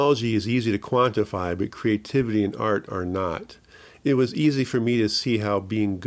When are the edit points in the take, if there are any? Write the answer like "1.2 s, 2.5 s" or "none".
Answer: none